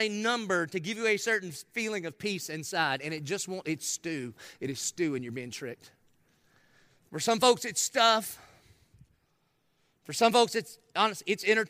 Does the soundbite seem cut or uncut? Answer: uncut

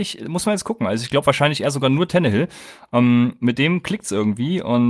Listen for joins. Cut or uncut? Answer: uncut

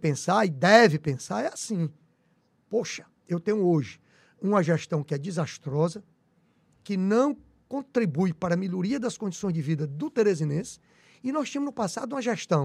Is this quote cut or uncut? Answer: uncut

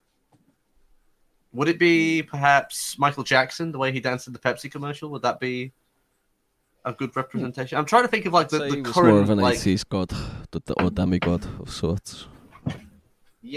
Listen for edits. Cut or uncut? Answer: uncut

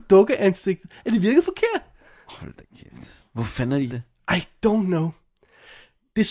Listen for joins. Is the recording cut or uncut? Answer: cut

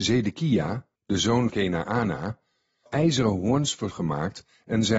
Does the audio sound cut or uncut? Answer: cut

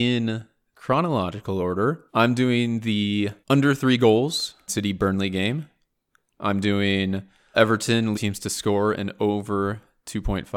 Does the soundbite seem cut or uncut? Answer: cut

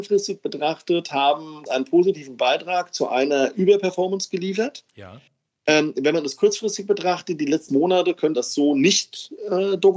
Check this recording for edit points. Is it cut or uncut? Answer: cut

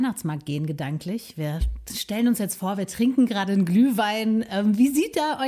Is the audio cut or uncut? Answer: uncut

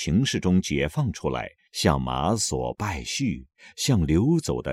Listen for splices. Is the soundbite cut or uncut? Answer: uncut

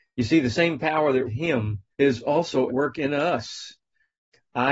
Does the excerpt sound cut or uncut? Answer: cut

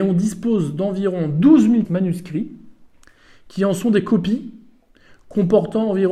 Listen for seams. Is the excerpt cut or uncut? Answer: cut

